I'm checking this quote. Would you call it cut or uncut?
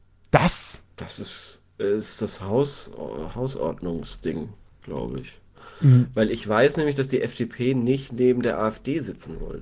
uncut